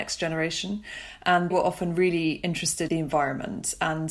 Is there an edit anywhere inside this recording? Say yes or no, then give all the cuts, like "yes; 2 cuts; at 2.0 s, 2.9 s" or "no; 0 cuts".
yes; 2 cuts; at 1.5 s, 2.9 s